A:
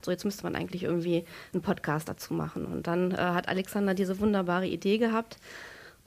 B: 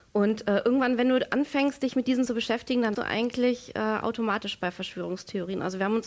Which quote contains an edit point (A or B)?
B